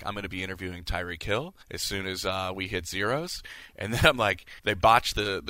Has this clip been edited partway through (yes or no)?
yes